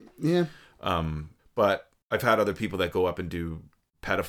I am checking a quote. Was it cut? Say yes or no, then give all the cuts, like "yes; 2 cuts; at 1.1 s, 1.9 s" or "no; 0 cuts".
yes; 1 cut; at 1.4 s